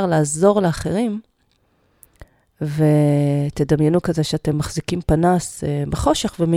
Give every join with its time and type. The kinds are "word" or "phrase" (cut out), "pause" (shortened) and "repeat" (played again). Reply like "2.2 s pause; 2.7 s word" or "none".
none

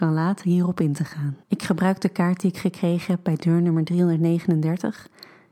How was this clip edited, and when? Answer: 1.4 s pause

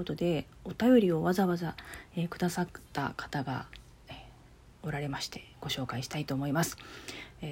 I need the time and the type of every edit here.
none

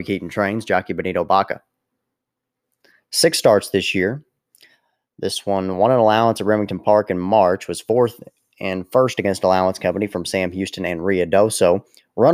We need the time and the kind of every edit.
none

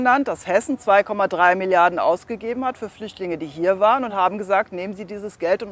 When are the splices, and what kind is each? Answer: none

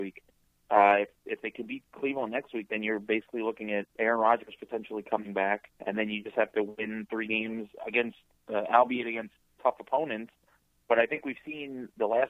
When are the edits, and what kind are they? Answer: 3.9 s pause; 5.8 s pause

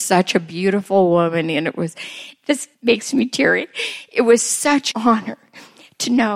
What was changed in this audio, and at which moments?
2.7 s pause; 4.9 s word

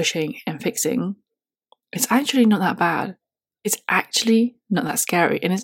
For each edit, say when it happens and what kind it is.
none

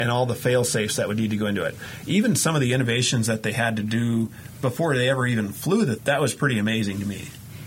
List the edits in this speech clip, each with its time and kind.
6.0 s word

